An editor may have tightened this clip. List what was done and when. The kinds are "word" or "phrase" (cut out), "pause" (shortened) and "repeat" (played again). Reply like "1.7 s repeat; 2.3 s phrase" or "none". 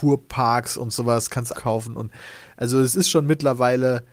1.5 s phrase